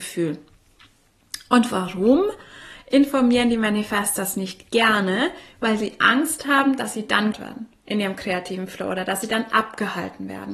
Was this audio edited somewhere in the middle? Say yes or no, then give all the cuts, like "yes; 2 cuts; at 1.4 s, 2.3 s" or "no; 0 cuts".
yes; 1 cut; at 7.3 s